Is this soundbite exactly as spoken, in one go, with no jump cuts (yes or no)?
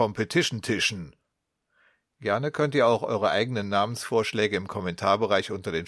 yes